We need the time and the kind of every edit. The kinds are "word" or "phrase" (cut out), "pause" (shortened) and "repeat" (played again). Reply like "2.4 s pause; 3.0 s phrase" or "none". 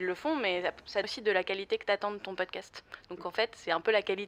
1.0 s word

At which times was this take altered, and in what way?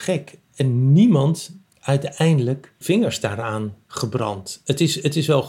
1.7 s word; 2.8 s word; 3.8 s pause

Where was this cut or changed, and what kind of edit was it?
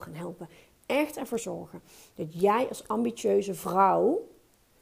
none

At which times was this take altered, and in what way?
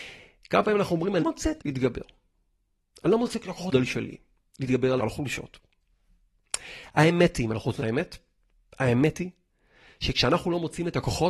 1.2 s word; 1.6 s word; 3.7 s word; 5.0 s word; 7.8 s word

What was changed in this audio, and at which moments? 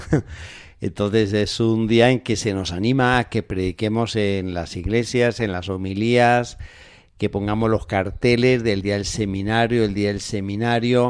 none

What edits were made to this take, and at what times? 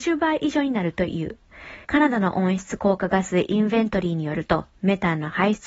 1.8 s pause

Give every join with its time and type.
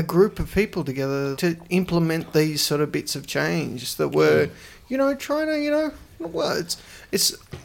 1.4 s word

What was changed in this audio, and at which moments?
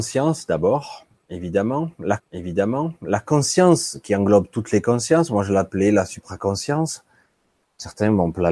2.2 s repeat

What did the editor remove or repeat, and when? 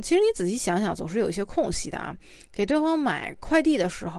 none

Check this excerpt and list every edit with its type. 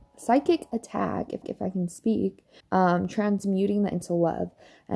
1.4 s repeat; 2.6 s pause; 3.9 s word

